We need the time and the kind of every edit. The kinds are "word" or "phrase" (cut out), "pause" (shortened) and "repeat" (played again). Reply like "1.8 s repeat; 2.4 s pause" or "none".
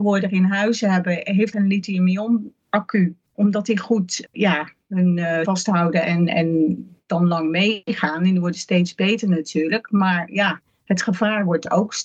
1.5 s word; 5.4 s word; 6.3 s word